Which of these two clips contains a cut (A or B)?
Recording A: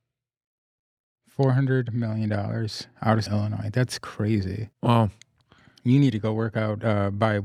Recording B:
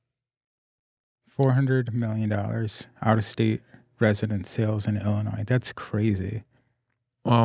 A